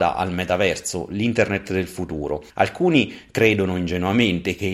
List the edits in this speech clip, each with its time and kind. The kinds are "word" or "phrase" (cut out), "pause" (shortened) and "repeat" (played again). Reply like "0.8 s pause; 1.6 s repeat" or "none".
2.5 s pause

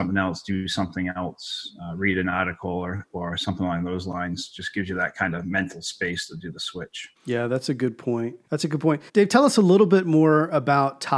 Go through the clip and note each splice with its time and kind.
7.2 s pause; 8.4 s pause; 9.1 s pause

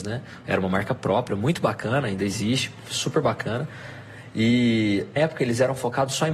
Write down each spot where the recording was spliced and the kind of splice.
5.2 s word

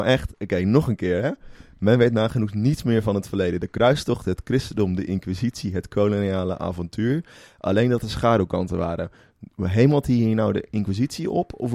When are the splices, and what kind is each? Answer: none

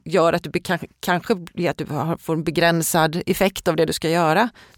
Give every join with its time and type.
none

